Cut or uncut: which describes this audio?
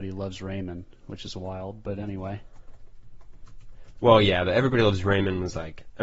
uncut